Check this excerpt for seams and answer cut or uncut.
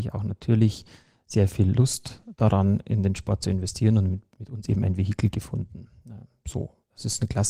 uncut